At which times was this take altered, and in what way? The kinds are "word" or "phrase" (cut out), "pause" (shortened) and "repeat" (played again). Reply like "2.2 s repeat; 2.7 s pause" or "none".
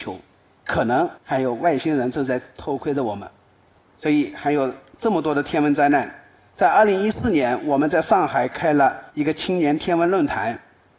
1.2 s pause; 9.1 s pause